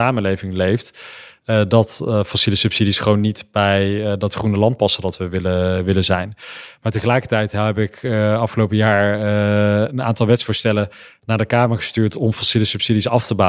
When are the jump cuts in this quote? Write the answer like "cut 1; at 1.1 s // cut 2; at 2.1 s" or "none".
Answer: none